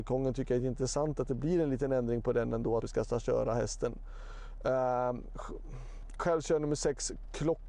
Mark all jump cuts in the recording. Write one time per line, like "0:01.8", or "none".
0:02.8